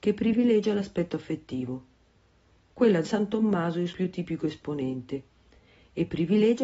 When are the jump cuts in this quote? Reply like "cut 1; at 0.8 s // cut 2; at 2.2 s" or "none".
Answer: cut 1; at 3.0 s // cut 2; at 3.9 s